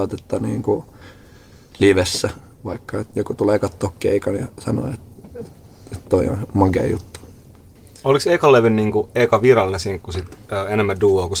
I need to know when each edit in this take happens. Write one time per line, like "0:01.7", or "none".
none